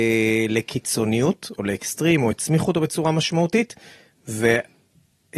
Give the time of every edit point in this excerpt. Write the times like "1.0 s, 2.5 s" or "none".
none